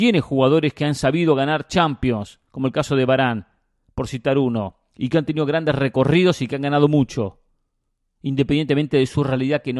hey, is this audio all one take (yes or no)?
yes